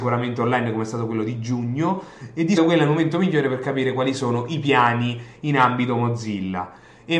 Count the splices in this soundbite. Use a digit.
1